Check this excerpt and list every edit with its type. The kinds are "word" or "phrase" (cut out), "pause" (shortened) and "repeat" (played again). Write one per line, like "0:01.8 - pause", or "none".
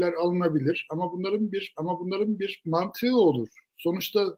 0:01.7 - repeat